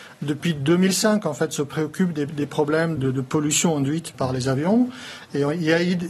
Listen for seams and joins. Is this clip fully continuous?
no; 2 cuts; at 3.0 s, 4.1 s

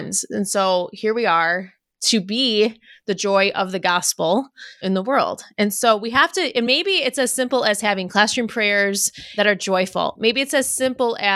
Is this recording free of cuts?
yes; 0 cuts

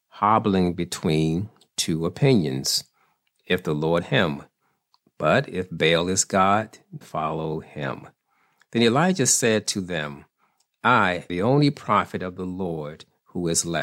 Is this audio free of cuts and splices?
no; 3 cuts; at 4.0 s, 7.0 s, 11.3 s

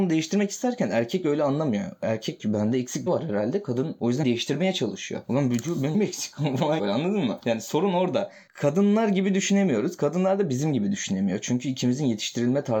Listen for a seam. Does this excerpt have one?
yes; 5 cuts; at 2.4 s, 3.1 s, 4.2 s, 5.9 s, 6.8 s

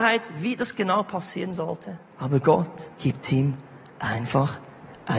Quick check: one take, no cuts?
no; 2 cuts; at 2.1 s, 2.9 s

